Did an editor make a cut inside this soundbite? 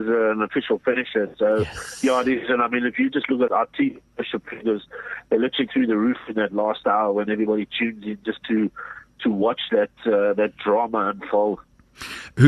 yes; 2 cuts; at 3.5 s, 5.7 s

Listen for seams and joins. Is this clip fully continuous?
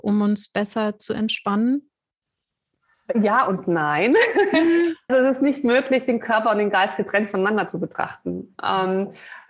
no; 1 cut; at 5.1 s

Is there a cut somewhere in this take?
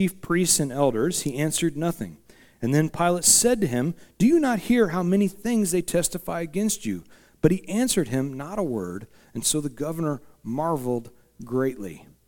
no; 0 cuts

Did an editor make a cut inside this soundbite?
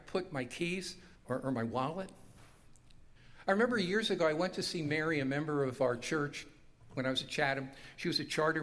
yes; 1 cut; at 1.2 s

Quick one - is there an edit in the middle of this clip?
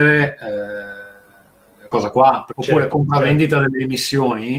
yes; 3 cuts; at 1.9 s, 2.5 s, 2.9 s

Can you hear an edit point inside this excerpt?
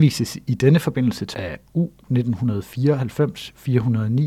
yes; 1 cut; at 1.3 s

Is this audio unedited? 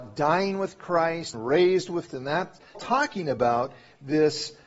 no; 3 cuts; at 1.3 s, 2.1 s, 2.7 s

